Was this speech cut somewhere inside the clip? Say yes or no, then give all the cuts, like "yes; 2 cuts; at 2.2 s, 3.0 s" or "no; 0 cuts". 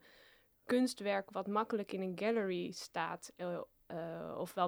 no; 0 cuts